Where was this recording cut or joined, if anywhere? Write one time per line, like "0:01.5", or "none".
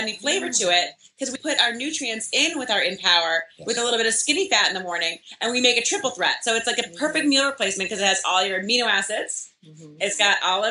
0:01.4